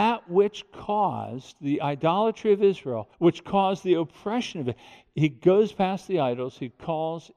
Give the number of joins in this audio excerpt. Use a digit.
1